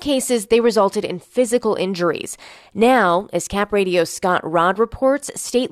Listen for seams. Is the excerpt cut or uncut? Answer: uncut